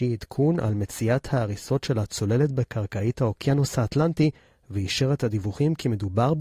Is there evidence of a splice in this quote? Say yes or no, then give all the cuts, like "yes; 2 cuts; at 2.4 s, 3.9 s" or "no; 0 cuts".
no; 0 cuts